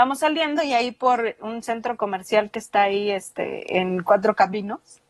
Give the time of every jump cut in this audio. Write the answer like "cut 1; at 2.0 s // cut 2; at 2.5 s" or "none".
none